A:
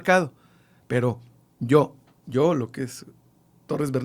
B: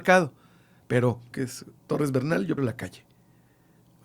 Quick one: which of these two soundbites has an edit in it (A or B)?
B